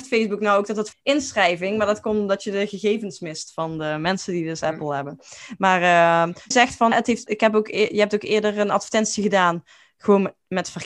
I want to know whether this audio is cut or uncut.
cut